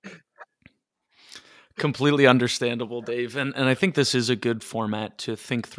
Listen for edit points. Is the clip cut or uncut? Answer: uncut